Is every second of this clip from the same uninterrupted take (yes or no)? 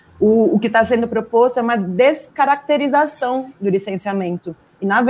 yes